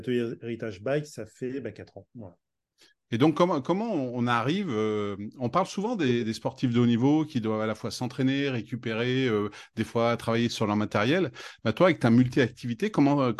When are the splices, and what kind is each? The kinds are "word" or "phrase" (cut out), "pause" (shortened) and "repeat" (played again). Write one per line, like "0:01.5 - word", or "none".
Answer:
none